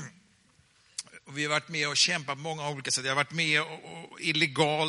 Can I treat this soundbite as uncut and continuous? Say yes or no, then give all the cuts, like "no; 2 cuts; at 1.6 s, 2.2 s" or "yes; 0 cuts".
yes; 0 cuts